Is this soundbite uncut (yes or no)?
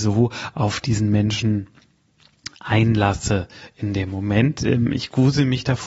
yes